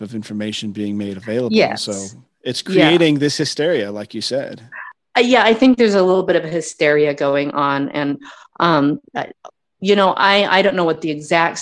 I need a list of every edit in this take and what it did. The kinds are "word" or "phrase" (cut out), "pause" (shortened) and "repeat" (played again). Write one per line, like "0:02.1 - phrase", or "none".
none